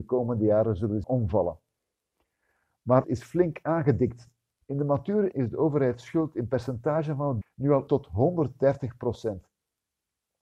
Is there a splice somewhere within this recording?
yes; 5 cuts; at 1.0 s, 3.0 s, 5.3 s, 7.4 s, 7.9 s

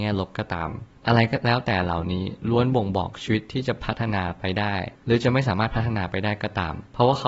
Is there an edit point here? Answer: yes; 1 cut; at 4.9 s

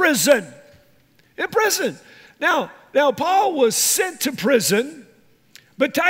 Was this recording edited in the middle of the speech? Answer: no; 0 cuts

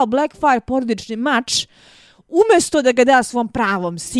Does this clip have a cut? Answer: no; 0 cuts

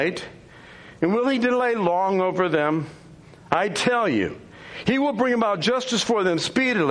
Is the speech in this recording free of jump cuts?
yes; 0 cuts

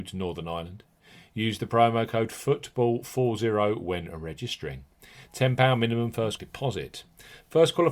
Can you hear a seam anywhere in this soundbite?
yes; 1 cut; at 6.4 s

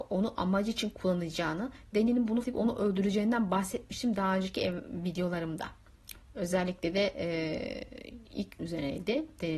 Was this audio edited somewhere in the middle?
yes; 3 cuts; at 1.9 s, 2.4 s, 8.6 s

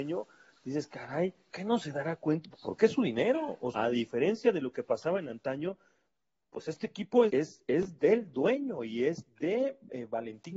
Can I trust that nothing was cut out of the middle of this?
no; 4 cuts; at 1.5 s, 2.5 s, 3.7 s, 7.3 s

